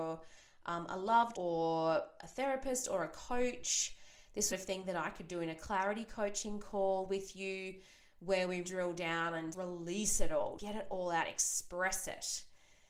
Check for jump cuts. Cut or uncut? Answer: cut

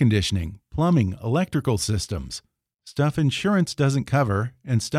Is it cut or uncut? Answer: uncut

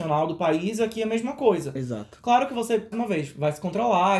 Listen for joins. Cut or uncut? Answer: cut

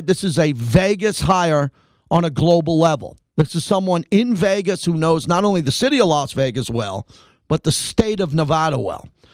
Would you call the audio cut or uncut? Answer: uncut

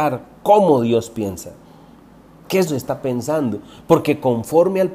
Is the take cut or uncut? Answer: cut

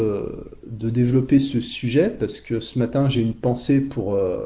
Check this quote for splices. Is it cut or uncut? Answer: uncut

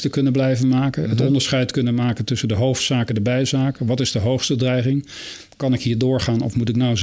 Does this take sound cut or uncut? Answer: uncut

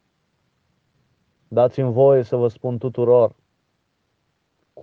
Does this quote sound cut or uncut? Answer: uncut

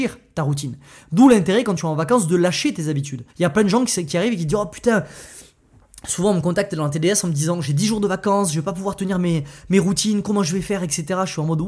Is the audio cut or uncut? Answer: cut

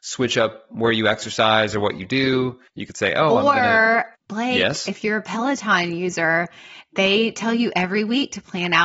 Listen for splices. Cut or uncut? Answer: cut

